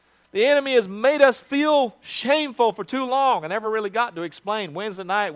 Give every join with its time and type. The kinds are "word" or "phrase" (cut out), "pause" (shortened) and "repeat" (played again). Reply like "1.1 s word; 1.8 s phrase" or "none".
none